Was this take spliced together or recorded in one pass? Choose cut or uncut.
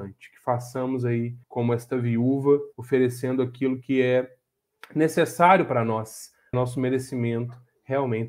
cut